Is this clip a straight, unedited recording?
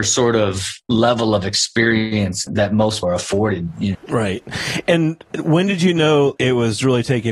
no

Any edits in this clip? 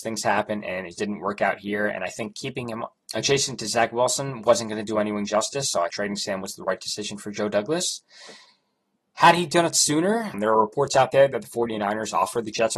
yes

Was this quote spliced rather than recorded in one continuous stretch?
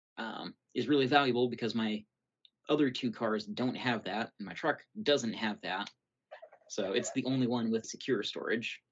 yes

